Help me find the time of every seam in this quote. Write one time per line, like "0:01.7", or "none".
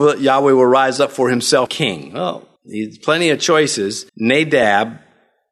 0:01.7
0:02.6
0:04.1